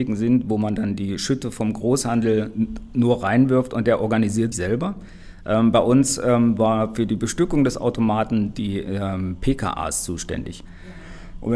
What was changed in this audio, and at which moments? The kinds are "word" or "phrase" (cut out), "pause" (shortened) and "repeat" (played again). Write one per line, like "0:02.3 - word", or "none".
0:04.5 - word